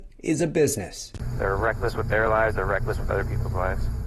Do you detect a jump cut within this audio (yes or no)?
no